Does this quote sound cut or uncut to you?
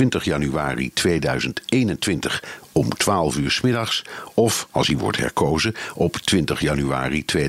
uncut